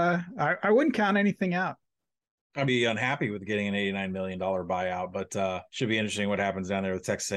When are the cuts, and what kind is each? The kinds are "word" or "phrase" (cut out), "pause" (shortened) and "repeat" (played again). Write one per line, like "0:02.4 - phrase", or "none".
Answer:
0:02.7 - phrase
0:05.7 - pause